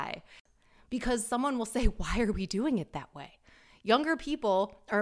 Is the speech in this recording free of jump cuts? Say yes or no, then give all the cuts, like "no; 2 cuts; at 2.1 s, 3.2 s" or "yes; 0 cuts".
yes; 0 cuts